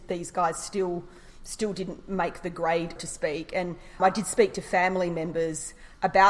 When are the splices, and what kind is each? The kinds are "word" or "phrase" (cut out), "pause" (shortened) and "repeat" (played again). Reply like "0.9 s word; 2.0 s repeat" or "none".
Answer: 3.0 s word; 4.0 s word